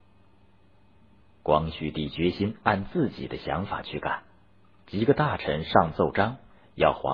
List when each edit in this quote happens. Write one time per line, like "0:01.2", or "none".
0:04.6